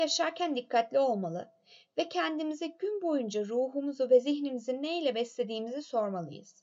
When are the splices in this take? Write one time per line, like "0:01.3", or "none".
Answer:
none